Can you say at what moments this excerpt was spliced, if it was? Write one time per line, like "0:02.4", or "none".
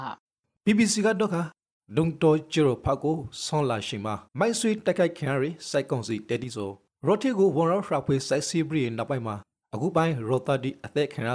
0:04.3

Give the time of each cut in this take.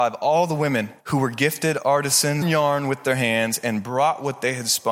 0:01.0
0:02.4

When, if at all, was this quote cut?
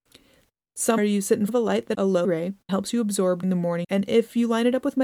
0:01.0
0:01.5
0:01.9
0:02.2
0:02.7
0:03.4
0:03.8

